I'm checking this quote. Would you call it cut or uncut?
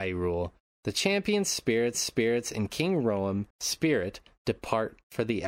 cut